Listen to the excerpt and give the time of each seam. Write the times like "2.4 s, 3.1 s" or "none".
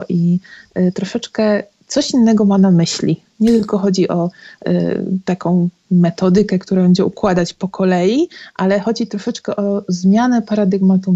none